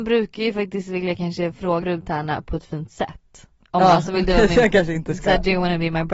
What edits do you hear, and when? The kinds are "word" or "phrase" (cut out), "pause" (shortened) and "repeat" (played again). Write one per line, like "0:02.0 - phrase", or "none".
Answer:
0:01.8 - word